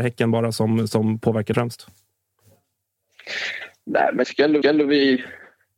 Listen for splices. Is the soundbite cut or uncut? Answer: cut